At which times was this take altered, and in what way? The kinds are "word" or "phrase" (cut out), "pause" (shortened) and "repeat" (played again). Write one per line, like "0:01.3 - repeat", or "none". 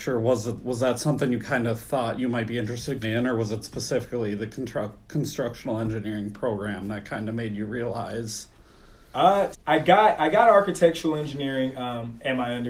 0:03.0 - word
0:09.5 - word

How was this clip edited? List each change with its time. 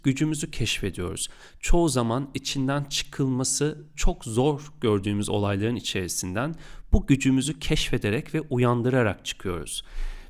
none

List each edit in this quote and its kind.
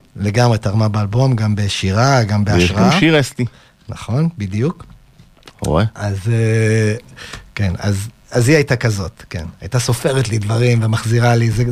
none

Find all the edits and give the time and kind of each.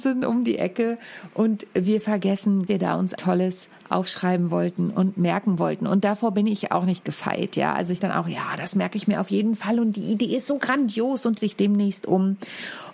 0:02.7 - phrase
0:03.2 - word
0:08.0 - word
0:11.4 - word

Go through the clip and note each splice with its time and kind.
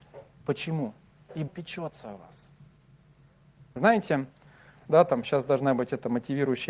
0:01.5 - word
0:04.8 - word

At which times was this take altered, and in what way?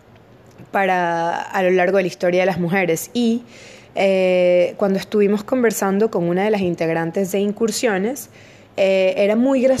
none

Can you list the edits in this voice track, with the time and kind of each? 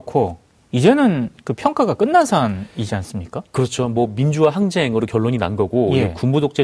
none

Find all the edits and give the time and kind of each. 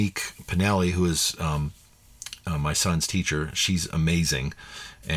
none

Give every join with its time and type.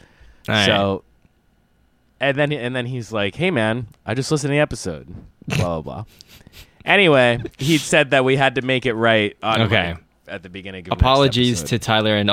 none

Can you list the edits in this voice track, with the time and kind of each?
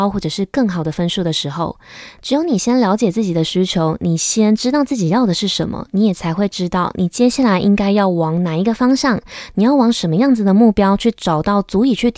none

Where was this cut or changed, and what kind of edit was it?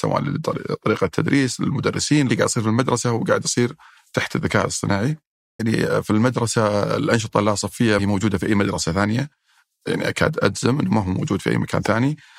0:02.3 - phrase
0:05.6 - word
0:08.0 - word

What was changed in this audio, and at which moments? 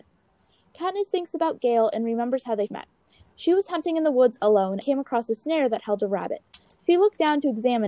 0:02.7 - word
0:04.8 - word

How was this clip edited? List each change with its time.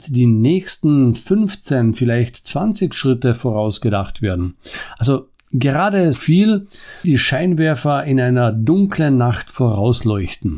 0:06.1 - word
0:07.0 - word

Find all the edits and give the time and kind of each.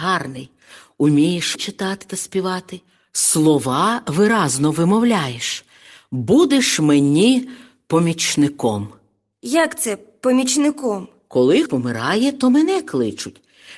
0:01.6 - word
0:11.7 - word

